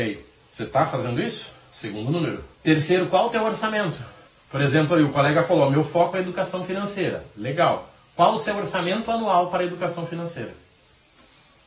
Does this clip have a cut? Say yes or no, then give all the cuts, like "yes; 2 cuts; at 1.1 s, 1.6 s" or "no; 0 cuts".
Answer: yes; 2 cuts; at 2.5 s, 4.3 s